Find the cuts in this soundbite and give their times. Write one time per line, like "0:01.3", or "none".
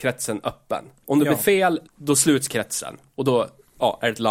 0:01.9